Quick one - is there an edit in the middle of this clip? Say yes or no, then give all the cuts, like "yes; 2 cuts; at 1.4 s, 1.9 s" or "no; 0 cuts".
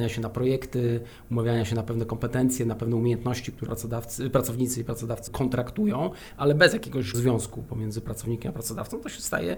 yes; 3 cuts; at 3.7 s, 5.3 s, 7.1 s